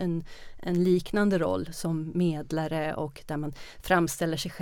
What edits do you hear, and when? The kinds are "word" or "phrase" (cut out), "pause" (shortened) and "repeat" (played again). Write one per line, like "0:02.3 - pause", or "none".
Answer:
none